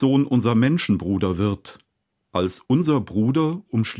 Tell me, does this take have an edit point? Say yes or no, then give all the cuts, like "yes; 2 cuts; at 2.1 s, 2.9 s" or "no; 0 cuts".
no; 0 cuts